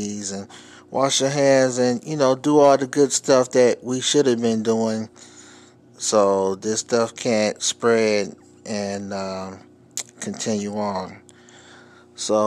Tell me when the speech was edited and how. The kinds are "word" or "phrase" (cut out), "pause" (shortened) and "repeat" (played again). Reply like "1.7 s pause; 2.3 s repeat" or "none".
none